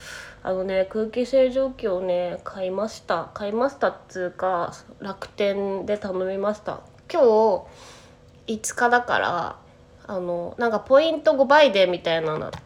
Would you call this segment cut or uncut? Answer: uncut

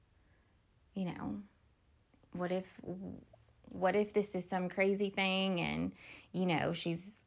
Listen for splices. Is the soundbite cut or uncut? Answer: uncut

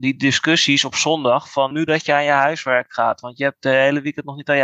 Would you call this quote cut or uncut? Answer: cut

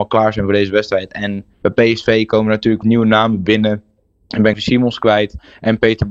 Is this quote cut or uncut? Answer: cut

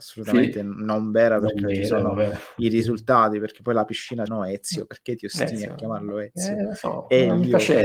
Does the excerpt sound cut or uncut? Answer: cut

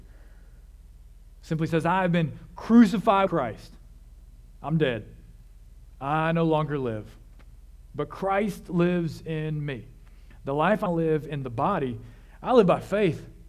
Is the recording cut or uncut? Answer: cut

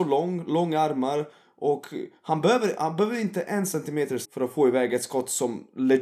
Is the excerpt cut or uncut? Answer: cut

